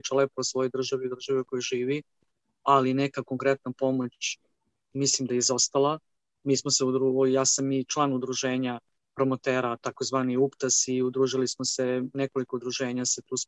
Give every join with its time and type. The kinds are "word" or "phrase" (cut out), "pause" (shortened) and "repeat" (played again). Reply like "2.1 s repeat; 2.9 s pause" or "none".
none